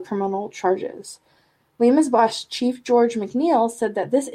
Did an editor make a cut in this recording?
no; 0 cuts

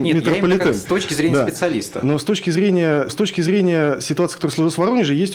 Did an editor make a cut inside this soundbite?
yes; 1 cut; at 3.1 s

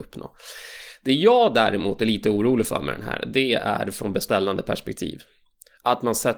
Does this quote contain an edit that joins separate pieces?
no; 0 cuts

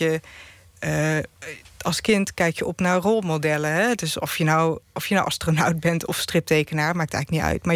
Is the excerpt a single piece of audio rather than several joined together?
yes; 0 cuts

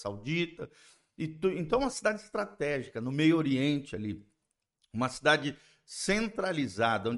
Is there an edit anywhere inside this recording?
no; 0 cuts

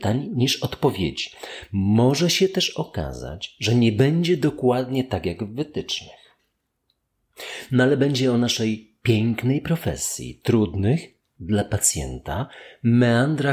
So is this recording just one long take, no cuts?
yes; 0 cuts

